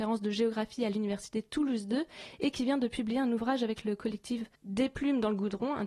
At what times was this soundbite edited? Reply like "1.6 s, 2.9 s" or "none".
4.5 s